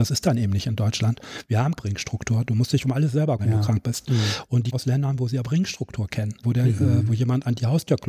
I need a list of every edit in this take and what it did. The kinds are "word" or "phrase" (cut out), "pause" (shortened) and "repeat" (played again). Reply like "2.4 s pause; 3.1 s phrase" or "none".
1.8 s word; 3.4 s word; 4.7 s word; 5.4 s word; 6.4 s word